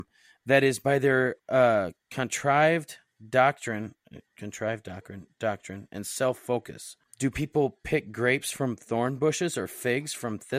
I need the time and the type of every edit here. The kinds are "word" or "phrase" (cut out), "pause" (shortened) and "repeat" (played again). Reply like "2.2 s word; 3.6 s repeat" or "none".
1.4 s pause